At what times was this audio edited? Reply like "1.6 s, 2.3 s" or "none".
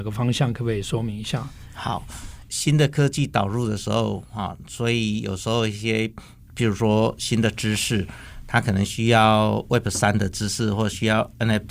none